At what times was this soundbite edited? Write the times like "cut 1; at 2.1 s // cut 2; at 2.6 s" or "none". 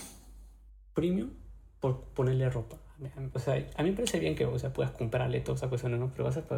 cut 1; at 3.3 s